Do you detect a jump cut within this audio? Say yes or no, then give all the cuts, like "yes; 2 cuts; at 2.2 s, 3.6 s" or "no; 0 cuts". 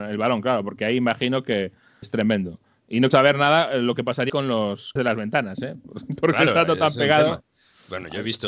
yes; 4 cuts; at 2.0 s, 3.1 s, 4.3 s, 5.0 s